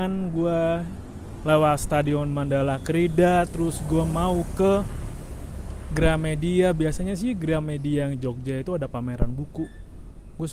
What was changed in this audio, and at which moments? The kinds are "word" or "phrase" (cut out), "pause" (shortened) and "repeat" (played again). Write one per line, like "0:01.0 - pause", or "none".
none

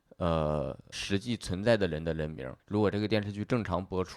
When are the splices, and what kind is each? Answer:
0:00.9 - word
0:02.6 - pause

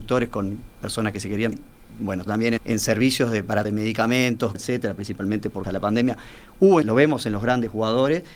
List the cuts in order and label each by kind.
0:01.5 - word
0:02.3 - word
0:02.6 - word
0:03.6 - word
0:04.5 - word
0:05.6 - word
0:06.8 - word

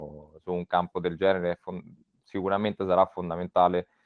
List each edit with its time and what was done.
none

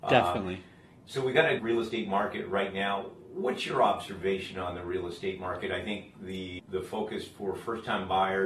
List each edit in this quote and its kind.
0:01.6 - word
0:06.6 - word

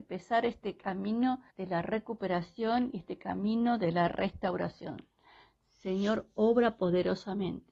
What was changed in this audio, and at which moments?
0:01.5 - pause

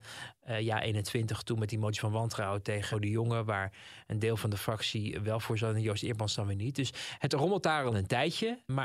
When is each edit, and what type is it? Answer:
0:02.9 - word

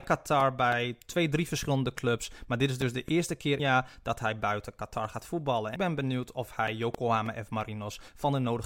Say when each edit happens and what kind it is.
0:03.6 - phrase
0:05.8 - word

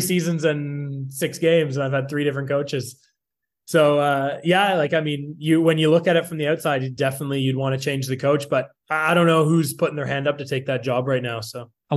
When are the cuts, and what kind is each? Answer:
none

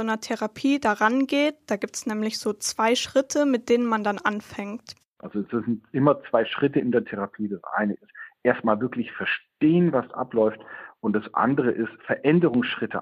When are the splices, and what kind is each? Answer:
0:12.0 - pause

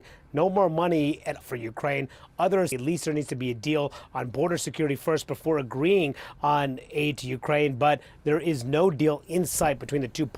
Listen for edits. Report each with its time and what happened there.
0:01.4 - word
0:02.7 - word

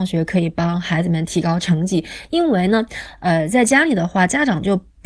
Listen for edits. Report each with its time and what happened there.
none

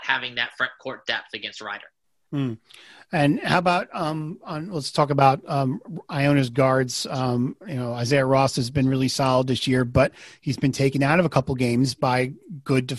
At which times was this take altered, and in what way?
none

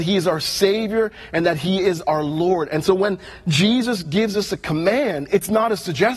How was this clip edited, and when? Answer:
none

